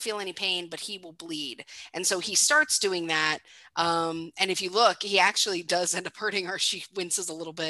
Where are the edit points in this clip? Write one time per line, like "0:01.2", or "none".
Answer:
none